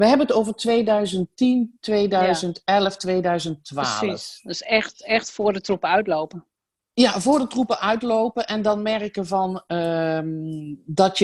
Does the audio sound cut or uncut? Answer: uncut